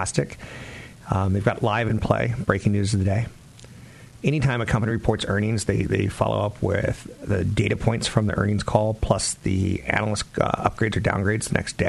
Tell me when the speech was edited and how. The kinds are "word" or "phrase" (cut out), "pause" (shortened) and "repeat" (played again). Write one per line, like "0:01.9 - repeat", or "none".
none